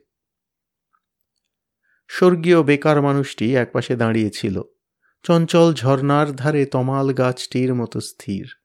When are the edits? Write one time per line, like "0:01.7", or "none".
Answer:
none